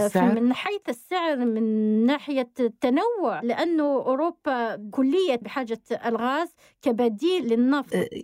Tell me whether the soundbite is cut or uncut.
cut